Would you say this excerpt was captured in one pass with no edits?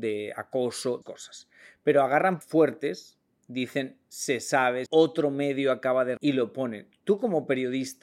no; 4 cuts; at 1.0 s, 2.4 s, 4.9 s, 6.2 s

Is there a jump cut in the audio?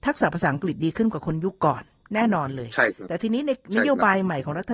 no; 0 cuts

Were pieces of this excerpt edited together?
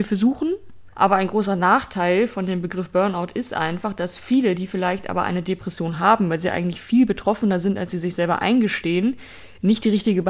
yes; 1 cut; at 0.9 s

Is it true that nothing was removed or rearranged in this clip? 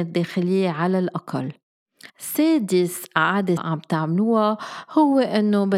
no; 2 cuts; at 2.1 s, 3.6 s

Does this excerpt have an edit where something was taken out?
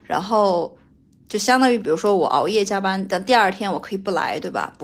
no; 0 cuts

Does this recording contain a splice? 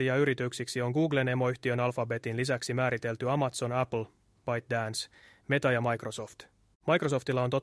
no; 0 cuts

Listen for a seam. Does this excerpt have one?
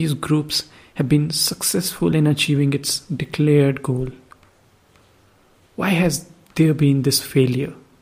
no; 0 cuts

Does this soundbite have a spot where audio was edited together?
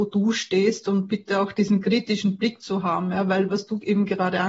no; 0 cuts

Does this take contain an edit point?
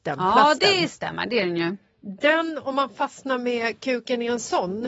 no; 0 cuts

